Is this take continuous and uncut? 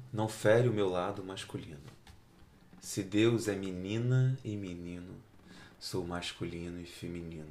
yes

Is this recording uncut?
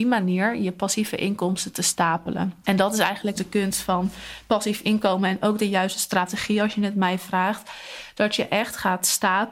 no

